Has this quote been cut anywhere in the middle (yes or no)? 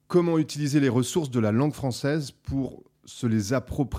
no